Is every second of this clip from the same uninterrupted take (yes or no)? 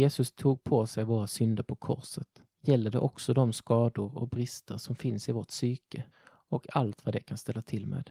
no